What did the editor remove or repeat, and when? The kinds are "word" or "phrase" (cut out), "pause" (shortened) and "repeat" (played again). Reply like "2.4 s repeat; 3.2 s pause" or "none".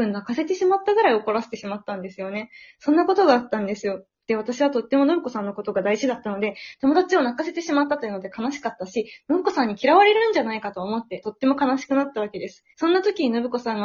11.2 s phrase; 12.7 s pause